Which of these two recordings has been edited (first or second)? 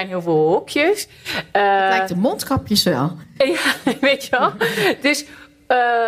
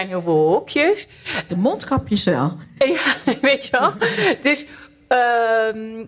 second